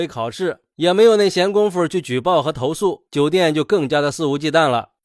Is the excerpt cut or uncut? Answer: uncut